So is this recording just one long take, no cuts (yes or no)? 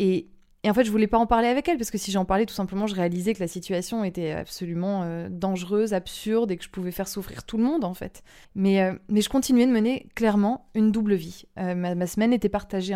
no